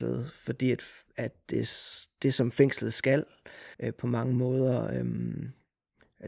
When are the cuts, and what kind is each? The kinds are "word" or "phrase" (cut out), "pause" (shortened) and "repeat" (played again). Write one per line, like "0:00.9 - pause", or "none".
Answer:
0:03.7 - pause